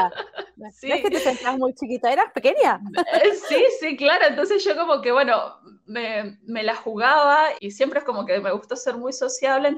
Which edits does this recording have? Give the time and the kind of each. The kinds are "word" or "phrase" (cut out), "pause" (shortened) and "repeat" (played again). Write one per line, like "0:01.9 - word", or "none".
0:07.6 - word

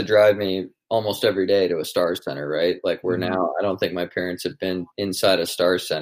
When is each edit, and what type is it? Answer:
0:04.9 - pause

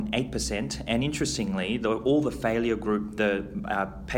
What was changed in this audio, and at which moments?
none

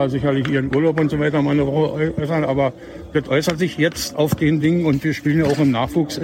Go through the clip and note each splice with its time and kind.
none

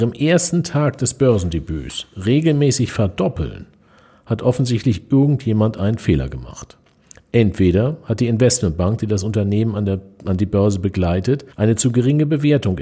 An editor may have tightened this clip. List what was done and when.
0:11.5 - pause

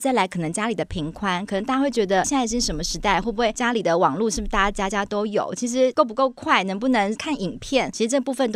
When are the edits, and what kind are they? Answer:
0:02.2 - word

